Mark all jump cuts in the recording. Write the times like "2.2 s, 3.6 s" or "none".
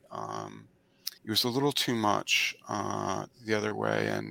1.2 s